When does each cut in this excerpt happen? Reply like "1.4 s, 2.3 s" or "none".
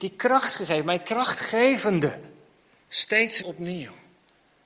3.4 s